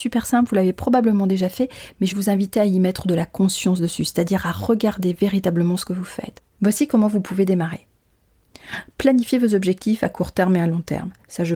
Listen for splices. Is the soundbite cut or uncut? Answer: cut